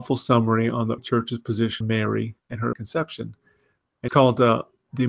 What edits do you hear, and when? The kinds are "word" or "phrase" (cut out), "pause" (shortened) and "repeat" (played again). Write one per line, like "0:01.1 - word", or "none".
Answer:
0:01.0 - word
0:01.8 - word
0:02.4 - pause
0:02.7 - word
0:04.1 - word